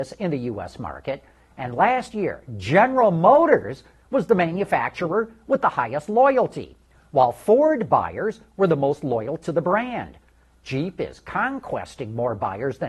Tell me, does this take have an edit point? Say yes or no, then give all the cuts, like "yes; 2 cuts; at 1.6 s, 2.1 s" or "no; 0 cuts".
no; 0 cuts